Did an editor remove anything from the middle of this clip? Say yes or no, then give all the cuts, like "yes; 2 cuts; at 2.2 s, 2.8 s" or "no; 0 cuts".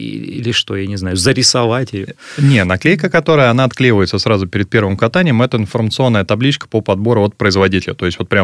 no; 0 cuts